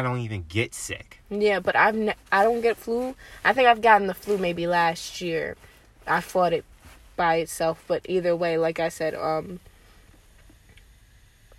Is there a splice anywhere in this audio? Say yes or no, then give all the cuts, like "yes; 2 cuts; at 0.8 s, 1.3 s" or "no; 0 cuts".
no; 0 cuts